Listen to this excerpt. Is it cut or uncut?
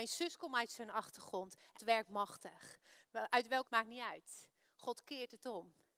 cut